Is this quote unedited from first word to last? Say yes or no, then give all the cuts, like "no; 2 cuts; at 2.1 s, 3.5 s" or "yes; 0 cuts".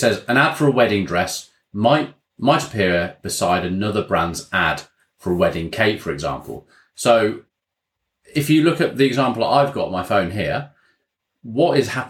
yes; 0 cuts